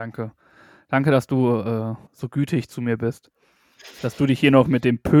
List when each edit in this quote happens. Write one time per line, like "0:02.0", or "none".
0:02.1